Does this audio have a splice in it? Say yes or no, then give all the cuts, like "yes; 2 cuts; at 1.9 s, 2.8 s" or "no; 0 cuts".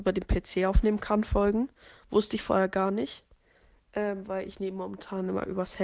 no; 0 cuts